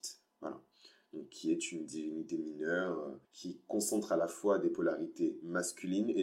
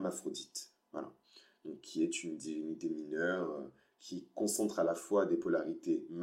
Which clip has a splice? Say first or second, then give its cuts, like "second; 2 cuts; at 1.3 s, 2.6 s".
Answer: first; 1 cut; at 3.2 s